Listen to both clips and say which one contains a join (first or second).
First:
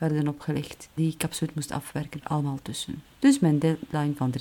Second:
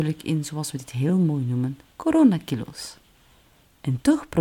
first